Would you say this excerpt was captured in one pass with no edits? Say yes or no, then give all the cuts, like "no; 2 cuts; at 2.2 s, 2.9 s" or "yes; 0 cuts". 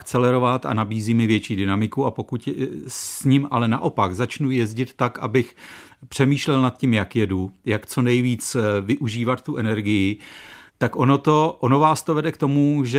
no; 1 cut; at 10.7 s